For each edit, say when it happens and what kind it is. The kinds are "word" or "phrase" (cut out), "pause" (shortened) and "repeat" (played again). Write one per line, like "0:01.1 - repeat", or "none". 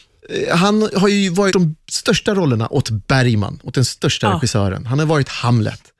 0:01.5 - word